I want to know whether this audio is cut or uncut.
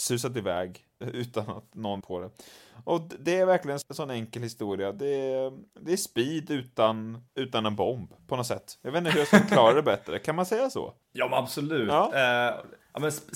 cut